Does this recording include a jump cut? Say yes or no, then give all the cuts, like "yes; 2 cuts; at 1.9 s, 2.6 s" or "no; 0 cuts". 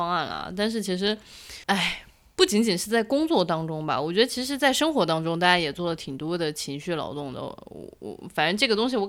yes; 1 cut; at 1.6 s